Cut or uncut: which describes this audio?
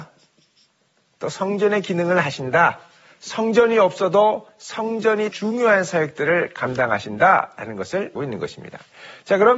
cut